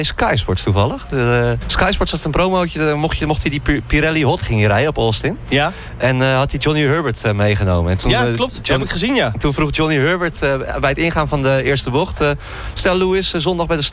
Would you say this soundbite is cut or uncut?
cut